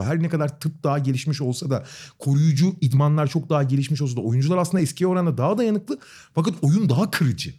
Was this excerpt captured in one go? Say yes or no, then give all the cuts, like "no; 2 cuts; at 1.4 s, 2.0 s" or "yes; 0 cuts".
yes; 0 cuts